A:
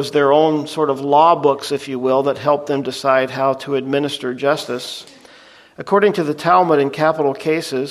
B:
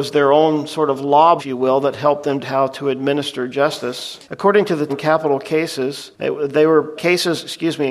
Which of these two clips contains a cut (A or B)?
B